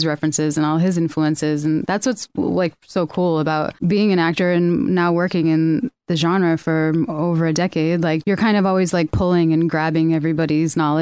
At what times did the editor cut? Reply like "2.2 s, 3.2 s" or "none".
none